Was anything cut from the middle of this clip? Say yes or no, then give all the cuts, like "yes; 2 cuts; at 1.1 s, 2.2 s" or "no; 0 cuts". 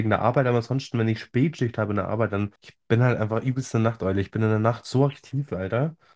yes; 1 cut; at 2.6 s